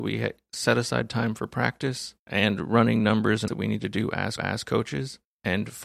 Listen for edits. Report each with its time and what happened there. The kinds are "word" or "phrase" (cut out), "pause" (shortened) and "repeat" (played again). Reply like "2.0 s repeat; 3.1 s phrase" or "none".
3.5 s phrase; 4.4 s repeat